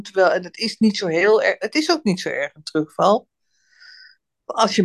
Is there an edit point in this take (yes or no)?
no